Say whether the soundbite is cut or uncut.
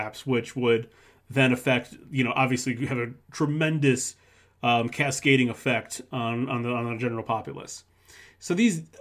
uncut